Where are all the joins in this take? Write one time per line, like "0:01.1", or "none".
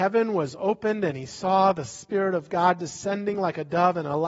none